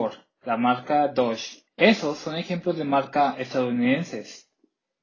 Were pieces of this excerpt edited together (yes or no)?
yes